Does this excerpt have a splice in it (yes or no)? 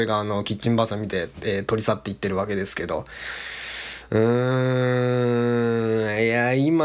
no